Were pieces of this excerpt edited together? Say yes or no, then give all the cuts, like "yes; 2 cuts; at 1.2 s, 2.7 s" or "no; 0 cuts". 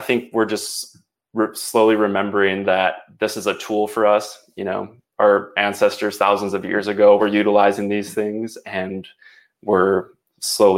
no; 0 cuts